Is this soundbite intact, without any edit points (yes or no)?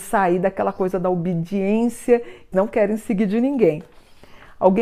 no